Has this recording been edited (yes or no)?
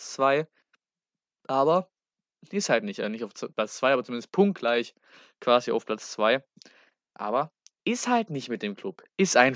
no